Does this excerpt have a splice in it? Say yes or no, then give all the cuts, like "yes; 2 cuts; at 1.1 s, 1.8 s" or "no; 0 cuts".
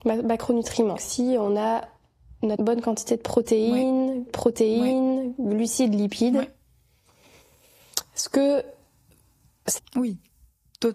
yes; 4 cuts; at 1.0 s, 2.6 s, 4.3 s, 9.8 s